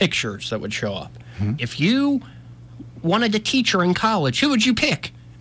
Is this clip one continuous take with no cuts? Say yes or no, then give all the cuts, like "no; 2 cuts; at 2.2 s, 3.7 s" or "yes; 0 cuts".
no; 1 cut; at 1.6 s